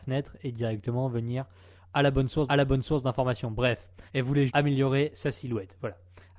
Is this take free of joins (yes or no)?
no